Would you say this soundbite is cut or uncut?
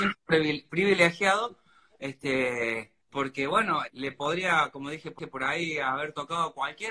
cut